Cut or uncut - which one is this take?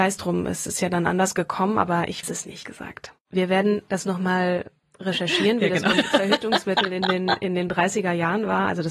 cut